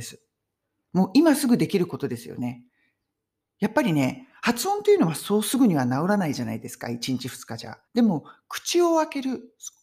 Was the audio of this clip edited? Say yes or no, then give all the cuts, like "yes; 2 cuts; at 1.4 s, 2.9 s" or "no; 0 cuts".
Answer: yes; 1 cut; at 7.9 s